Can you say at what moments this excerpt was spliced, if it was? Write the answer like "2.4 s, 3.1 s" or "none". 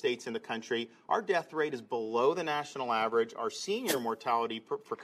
none